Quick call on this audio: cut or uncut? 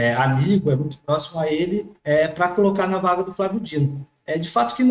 cut